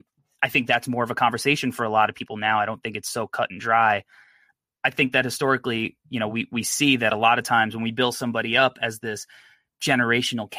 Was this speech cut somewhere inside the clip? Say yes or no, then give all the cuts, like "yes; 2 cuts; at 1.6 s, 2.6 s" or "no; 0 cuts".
no; 0 cuts